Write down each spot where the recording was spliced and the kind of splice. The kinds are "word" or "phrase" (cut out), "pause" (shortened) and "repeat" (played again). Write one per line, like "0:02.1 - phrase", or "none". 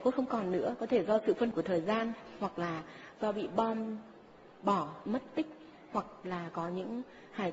0:01.5 - word
0:05.1 - word